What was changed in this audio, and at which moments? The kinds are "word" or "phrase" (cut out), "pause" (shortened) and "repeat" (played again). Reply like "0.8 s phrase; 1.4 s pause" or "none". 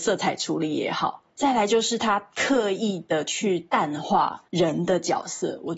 1.3 s pause; 4.5 s pause